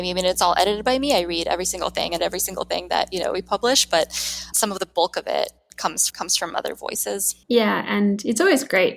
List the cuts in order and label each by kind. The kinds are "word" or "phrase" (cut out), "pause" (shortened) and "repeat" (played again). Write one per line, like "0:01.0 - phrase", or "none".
0:02.2 - word
0:04.5 - word
0:06.1 - word
0:07.4 - pause